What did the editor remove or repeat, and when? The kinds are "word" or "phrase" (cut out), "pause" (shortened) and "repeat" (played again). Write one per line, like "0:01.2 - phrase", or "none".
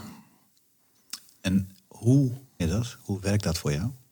0:02.6 - word